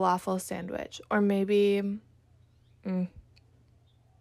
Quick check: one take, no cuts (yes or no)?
yes